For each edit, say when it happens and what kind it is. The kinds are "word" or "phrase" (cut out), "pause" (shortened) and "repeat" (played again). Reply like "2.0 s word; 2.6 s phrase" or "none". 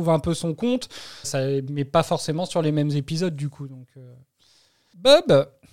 1.2 s word